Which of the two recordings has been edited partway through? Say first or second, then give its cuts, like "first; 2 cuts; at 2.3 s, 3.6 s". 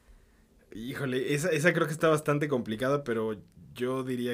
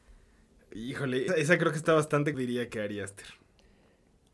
second; 2 cuts; at 1.3 s, 2.3 s